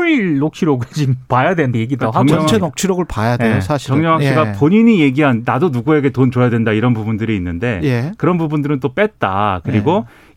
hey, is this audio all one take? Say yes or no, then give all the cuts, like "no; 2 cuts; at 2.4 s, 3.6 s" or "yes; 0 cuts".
no; 1 cut; at 1.7 s